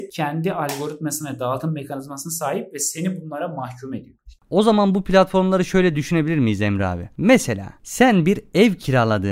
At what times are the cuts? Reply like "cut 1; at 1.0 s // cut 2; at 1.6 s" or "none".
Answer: none